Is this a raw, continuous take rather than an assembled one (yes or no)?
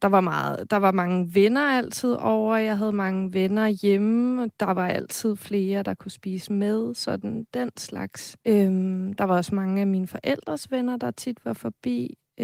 no